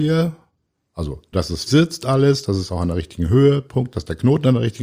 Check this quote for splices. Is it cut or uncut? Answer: cut